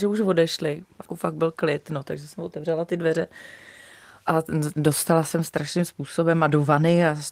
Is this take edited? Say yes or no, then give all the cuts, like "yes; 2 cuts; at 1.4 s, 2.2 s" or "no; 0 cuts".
yes; 1 cut; at 1.1 s